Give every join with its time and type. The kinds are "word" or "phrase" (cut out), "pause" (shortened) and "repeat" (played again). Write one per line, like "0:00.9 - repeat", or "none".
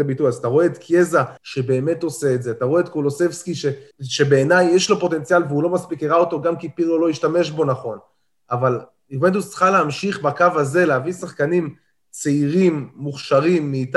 0:01.4 - pause
0:03.9 - pause